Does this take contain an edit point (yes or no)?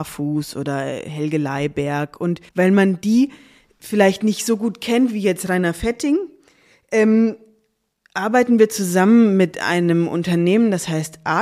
yes